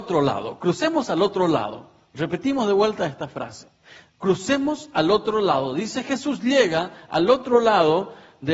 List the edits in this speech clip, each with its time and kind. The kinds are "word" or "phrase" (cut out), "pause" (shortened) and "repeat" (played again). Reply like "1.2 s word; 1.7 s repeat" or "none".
none